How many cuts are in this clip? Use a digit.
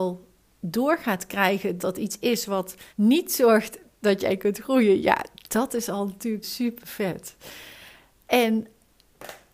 3